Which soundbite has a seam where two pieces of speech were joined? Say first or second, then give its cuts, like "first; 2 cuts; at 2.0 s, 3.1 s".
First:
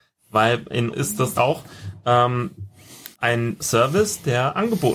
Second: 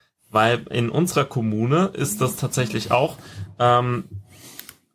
first; 3 cuts; at 0.9 s, 1.3 s, 3.1 s